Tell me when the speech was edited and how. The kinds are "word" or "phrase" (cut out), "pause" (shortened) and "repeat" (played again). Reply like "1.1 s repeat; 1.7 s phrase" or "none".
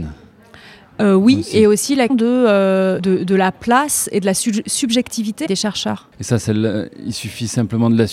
2.1 s word; 3.0 s word; 5.5 s phrase; 6.1 s pause